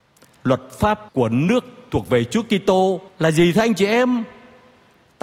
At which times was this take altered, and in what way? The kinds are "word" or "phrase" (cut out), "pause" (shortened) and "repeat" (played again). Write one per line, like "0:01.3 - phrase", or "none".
0:01.1 - pause
0:03.1 - pause